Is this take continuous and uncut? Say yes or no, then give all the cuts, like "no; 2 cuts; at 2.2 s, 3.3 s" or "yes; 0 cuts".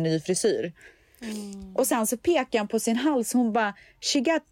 yes; 0 cuts